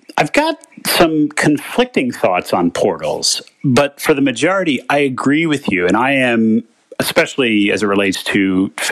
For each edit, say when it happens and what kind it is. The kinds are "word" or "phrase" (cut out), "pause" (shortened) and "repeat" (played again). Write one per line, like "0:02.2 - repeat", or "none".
none